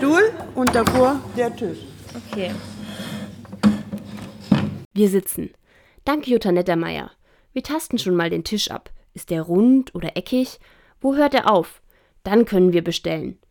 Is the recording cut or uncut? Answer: uncut